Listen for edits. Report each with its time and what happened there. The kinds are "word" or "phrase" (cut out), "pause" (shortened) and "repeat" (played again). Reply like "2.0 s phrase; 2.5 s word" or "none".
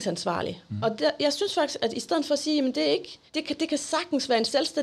3.3 s pause

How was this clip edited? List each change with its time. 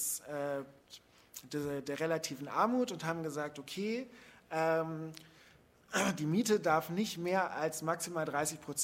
none

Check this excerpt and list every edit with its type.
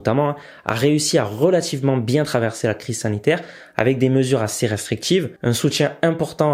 5.4 s pause

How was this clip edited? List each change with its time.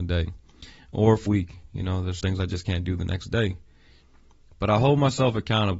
1.3 s word; 2.2 s word

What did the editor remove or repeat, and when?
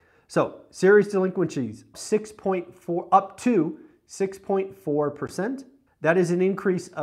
1.9 s word; 5.9 s pause

